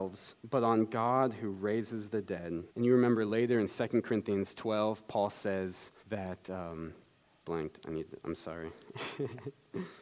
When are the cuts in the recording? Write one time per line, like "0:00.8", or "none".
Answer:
0:02.7
0:06.0
0:07.4